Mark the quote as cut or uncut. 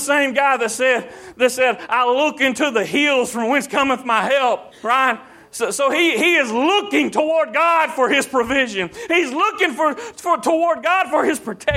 cut